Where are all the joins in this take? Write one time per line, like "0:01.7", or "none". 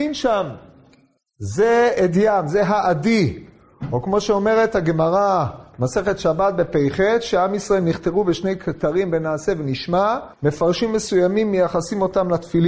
0:10.3